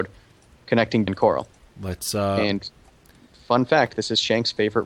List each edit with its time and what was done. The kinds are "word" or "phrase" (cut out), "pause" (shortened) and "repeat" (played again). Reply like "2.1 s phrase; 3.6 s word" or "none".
1.1 s word

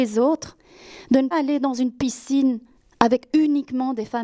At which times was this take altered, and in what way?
1.3 s word; 2.7 s pause

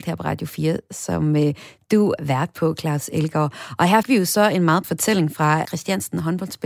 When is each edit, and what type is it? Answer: 2.2 s word; 4.0 s word; 4.8 s word; 5.6 s word

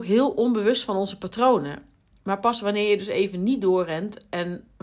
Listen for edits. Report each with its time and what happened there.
none

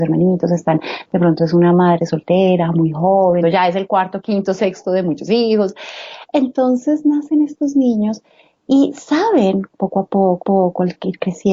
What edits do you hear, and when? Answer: 3.4 s phrase; 10.4 s repeat

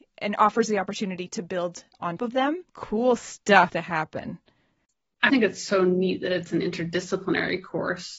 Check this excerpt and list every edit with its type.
2.2 s word; 2.7 s pause; 3.7 s word; 5.3 s word

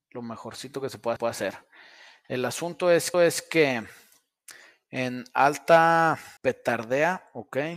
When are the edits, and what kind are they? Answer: 1.2 s repeat; 3.1 s repeat; 6.4 s pause

